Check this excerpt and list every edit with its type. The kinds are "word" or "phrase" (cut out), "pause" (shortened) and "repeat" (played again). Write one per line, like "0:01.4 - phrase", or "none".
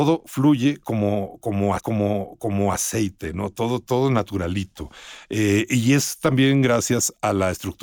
0:01.8 - repeat